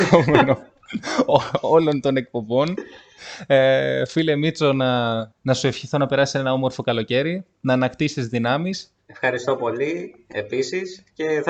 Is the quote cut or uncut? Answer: cut